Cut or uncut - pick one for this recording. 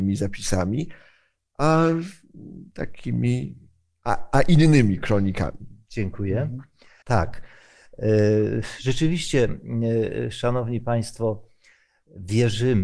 uncut